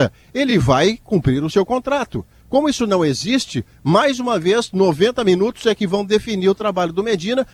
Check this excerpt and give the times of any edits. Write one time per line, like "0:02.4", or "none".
none